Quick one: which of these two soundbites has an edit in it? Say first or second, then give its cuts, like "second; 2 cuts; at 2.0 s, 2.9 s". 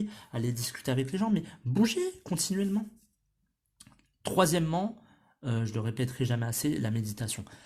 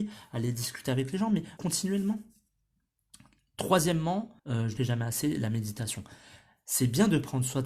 second; 3 cuts; at 1.6 s, 4.4 s, 4.8 s